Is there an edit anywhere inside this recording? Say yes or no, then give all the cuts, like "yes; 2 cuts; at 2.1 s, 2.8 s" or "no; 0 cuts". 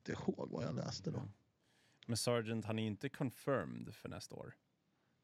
no; 0 cuts